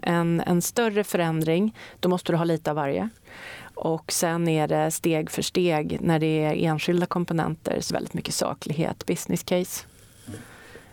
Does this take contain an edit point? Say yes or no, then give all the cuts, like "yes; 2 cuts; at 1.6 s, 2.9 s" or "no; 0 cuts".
yes; 1 cut; at 7.9 s